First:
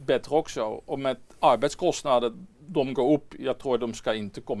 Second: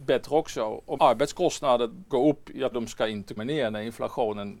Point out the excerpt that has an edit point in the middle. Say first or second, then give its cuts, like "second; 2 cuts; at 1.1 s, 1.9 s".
second; 4 cuts; at 1.0 s, 2.1 s, 2.7 s, 3.4 s